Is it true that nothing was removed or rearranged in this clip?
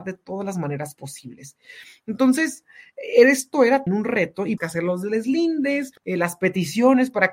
no; 3 cuts; at 3.9 s, 4.6 s, 6.0 s

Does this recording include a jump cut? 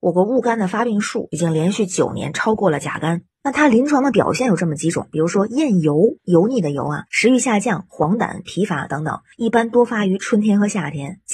yes; 1 cut; at 7.1 s

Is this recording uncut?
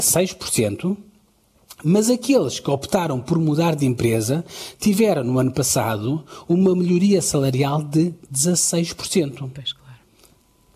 yes; 0 cuts

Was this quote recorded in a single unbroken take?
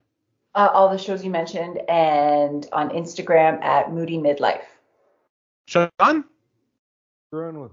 yes; 0 cuts

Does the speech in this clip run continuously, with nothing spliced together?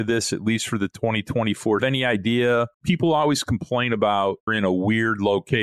no; 3 cuts; at 1.8 s, 2.7 s, 4.5 s

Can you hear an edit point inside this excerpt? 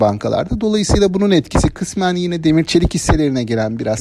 no; 0 cuts

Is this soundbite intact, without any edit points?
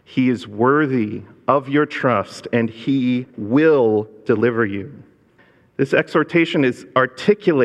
no; 2 cuts; at 3.3 s, 5.4 s

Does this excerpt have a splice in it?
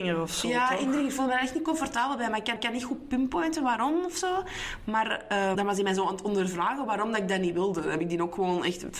yes; 2 cuts; at 2.6 s, 5.5 s

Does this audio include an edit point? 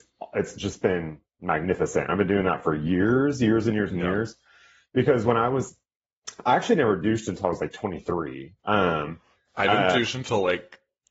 no; 0 cuts

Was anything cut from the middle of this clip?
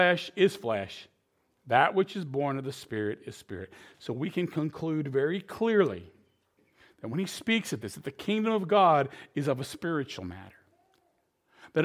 no; 0 cuts

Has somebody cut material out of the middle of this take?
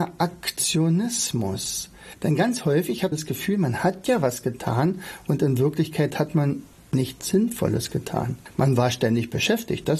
yes; 1 cut; at 3.1 s

